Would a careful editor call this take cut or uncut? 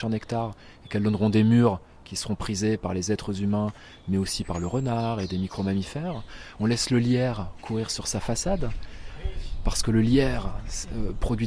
uncut